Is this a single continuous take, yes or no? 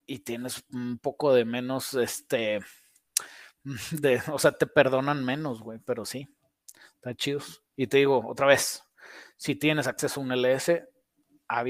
yes